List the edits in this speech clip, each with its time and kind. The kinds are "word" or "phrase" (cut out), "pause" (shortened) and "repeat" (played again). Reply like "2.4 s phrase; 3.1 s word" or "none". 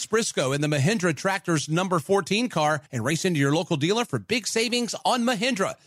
2.9 s pause